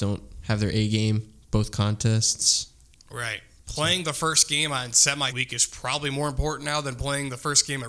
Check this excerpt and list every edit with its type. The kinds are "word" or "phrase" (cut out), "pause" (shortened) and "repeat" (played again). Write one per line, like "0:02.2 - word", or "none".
0:05.3 - word